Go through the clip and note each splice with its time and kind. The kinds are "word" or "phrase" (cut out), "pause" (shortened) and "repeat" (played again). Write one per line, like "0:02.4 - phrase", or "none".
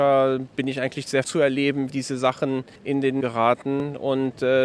0:01.2 - word
0:01.9 - word
0:02.8 - pause
0:03.2 - word

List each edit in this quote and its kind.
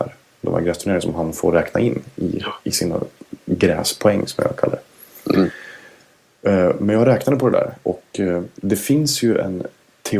none

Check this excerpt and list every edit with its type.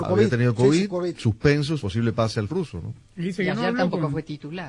0:01.2 - phrase
0:01.8 - word
0:02.5 - word

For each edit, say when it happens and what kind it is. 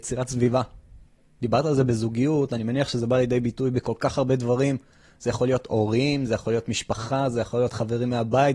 none

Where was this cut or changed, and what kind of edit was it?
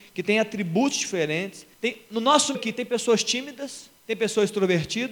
0:01.7 - pause
0:02.5 - word
0:04.0 - pause

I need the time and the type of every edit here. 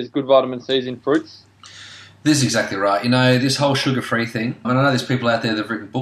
0:04.6 - word

